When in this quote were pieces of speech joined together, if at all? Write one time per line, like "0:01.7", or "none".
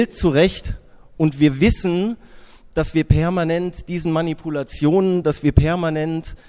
none